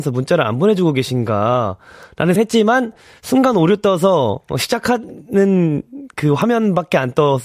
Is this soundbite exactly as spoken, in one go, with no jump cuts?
no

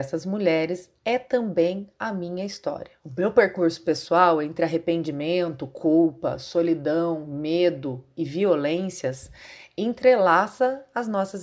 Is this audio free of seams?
yes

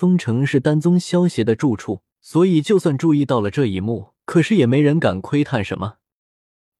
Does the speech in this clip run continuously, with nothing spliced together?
no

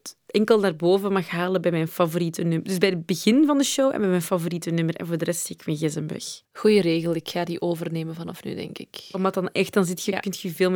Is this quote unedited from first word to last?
no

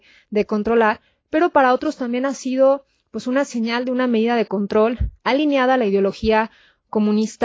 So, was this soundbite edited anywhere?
no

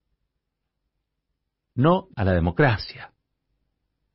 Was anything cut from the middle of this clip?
yes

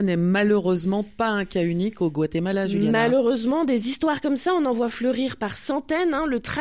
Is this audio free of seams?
yes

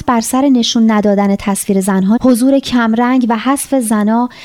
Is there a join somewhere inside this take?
yes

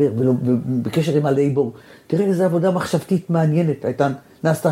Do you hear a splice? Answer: no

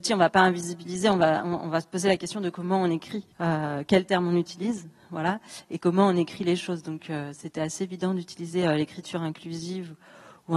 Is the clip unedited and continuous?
no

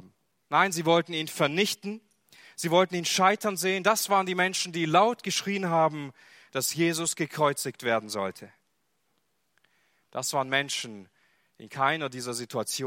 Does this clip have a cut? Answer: no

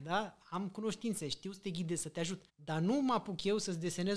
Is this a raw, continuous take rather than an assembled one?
no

